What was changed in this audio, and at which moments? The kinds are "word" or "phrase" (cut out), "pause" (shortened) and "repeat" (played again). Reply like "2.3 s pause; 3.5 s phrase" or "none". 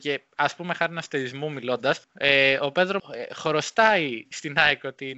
2.0 s pause; 3.0 s word